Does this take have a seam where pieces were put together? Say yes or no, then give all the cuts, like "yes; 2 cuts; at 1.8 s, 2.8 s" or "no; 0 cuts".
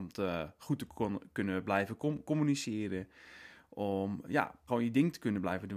yes; 1 cut; at 4.7 s